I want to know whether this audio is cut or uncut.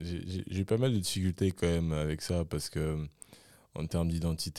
uncut